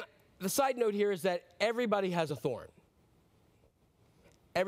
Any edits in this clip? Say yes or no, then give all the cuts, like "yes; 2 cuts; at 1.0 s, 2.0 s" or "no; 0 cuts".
no; 0 cuts